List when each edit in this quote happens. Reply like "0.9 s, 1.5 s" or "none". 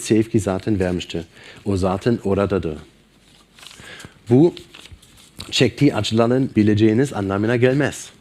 6.5 s